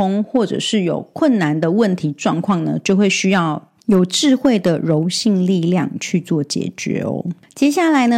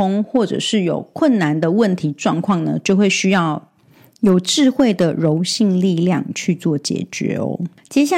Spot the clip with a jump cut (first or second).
first